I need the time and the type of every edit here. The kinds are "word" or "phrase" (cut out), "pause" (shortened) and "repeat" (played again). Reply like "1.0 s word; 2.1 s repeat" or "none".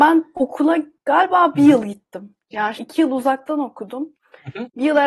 2.8 s word